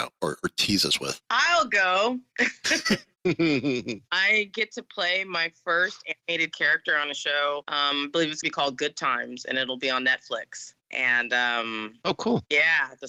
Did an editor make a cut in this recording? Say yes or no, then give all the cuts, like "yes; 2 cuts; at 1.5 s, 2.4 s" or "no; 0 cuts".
yes; 2 cuts; at 1.2 s, 8.4 s